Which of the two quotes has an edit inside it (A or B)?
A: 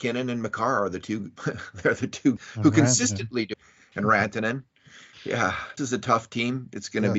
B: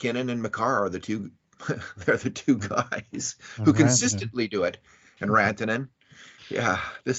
A